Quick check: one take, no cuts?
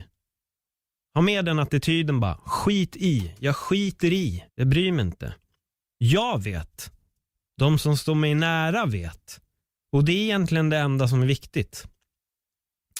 no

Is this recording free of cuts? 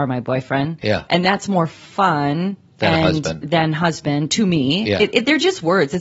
yes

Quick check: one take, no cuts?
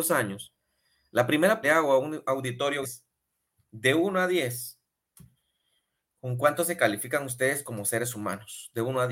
no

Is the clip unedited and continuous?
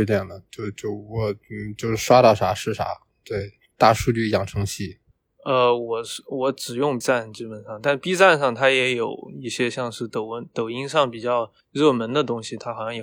no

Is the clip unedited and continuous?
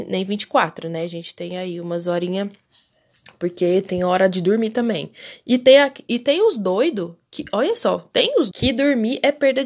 no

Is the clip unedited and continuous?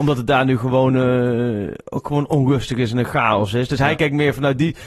yes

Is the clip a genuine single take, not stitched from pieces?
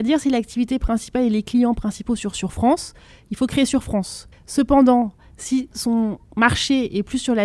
no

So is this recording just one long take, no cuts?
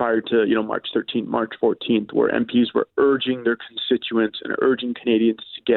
yes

